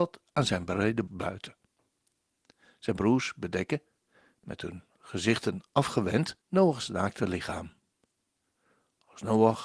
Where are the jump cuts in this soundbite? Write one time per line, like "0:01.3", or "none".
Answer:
0:01.1
0:06.4